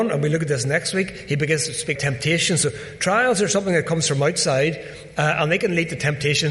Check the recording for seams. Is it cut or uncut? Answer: cut